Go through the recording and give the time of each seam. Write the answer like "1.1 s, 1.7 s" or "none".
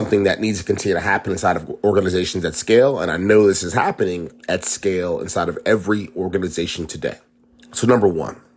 none

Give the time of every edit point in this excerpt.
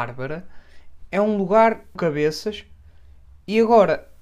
2.0 s

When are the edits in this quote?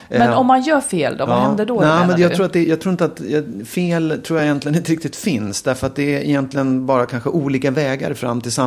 none

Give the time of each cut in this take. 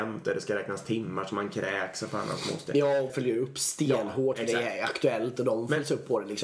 3.1 s

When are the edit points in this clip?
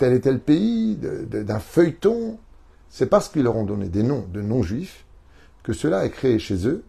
none

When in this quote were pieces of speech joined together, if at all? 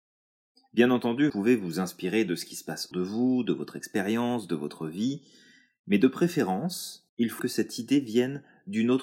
1.3 s, 2.9 s, 7.1 s, 7.4 s

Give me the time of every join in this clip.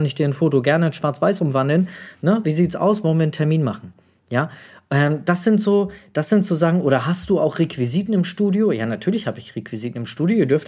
none

